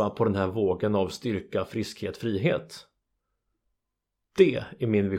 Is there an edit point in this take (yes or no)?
no